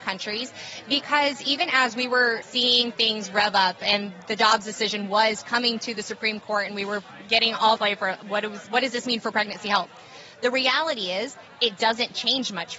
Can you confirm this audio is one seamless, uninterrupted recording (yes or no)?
no